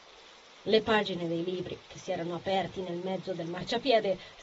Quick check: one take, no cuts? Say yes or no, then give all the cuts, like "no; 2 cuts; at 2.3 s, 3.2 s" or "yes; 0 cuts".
yes; 0 cuts